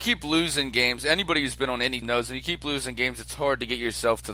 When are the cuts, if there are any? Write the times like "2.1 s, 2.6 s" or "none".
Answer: 2.0 s